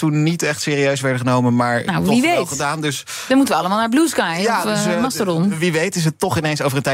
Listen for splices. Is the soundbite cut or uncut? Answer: uncut